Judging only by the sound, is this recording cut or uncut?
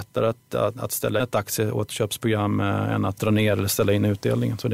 cut